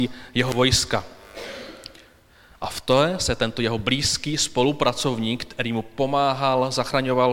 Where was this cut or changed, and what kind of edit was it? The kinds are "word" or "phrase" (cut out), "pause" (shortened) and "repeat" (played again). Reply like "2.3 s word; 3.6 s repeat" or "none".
none